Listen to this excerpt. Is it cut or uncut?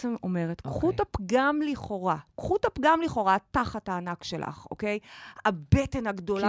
uncut